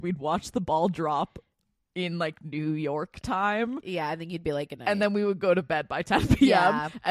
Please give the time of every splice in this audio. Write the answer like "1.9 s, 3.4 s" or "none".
none